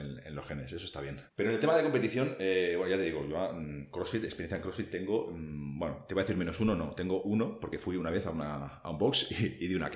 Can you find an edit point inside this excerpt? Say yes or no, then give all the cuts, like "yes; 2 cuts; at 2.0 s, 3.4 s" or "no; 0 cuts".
yes; 1 cut; at 1.3 s